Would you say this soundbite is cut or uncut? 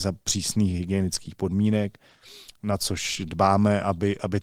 uncut